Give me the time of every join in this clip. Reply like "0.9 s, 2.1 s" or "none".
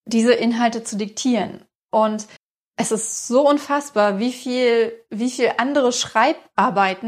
2.4 s